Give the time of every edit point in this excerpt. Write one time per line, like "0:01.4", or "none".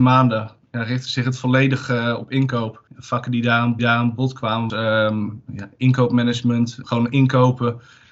0:02.9
0:03.8
0:04.7
0:06.8